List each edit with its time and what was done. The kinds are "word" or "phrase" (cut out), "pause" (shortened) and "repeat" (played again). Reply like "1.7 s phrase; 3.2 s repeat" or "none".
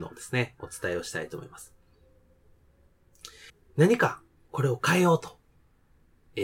3.5 s pause